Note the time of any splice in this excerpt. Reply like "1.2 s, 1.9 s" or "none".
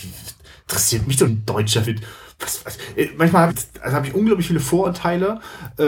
1.3 s, 1.8 s, 3.5 s